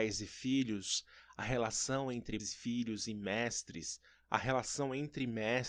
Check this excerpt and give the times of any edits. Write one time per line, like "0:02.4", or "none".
0:02.4